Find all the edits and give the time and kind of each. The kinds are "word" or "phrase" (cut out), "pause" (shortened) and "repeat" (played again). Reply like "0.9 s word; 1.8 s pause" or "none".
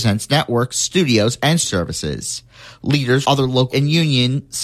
1.6 s word; 3.2 s word; 3.7 s word

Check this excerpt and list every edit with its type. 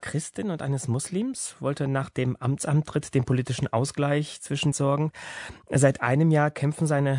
4.7 s phrase

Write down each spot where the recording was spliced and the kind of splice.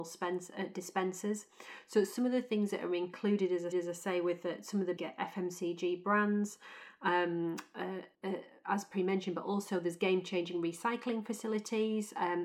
3.7 s repeat; 5.0 s word; 8.1 s pause

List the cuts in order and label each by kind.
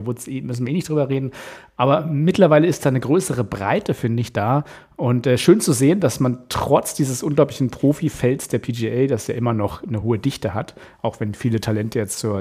none

